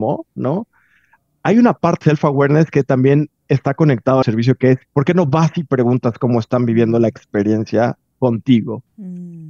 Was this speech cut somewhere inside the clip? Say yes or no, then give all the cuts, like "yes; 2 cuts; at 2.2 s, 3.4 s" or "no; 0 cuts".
yes; 3 cuts; at 2.0 s, 4.2 s, 4.8 s